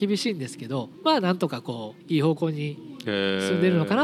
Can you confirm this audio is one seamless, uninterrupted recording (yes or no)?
no